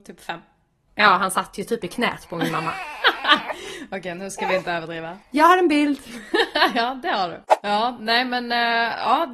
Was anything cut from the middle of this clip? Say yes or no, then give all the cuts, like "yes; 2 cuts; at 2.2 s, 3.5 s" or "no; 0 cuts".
yes; 1 cut; at 5.2 s